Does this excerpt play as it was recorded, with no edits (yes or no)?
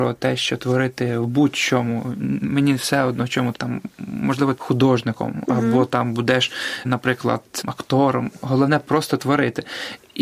no